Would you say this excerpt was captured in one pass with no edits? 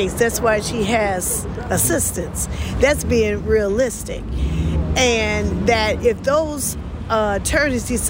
yes; 0 cuts

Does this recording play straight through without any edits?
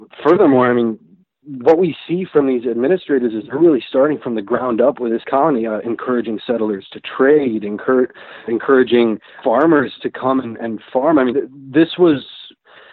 no; 4 cuts; at 1.2 s, 8.5 s, 9.4 s, 11.3 s

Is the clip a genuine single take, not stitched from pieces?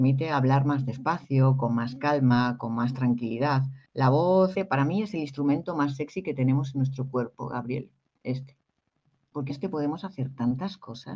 no; 3 cuts; at 3.9 s, 4.5 s, 9.5 s

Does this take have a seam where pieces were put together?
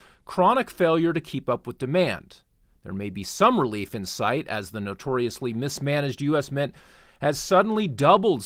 no; 0 cuts

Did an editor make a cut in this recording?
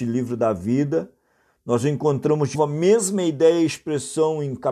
yes; 1 cut; at 2.5 s

